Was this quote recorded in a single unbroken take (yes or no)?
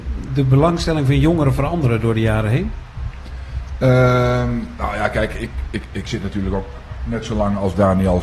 yes